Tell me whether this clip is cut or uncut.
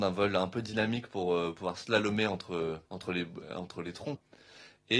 cut